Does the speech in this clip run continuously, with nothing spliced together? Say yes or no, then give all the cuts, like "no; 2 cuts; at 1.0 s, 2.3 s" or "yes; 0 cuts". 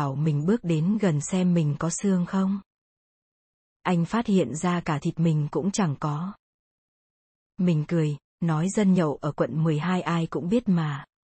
yes; 0 cuts